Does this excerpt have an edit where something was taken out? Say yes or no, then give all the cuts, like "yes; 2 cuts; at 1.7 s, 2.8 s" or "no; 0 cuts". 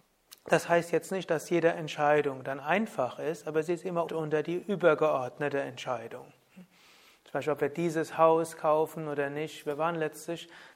yes; 1 cut; at 4.1 s